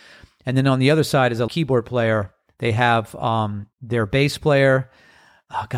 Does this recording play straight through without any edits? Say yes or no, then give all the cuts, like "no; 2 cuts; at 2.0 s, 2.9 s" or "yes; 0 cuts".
no; 2 cuts; at 1.5 s, 3.7 s